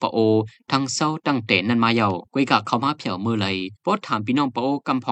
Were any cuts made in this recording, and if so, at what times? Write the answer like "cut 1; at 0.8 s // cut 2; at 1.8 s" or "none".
cut 1; at 2.3 s // cut 2; at 3.8 s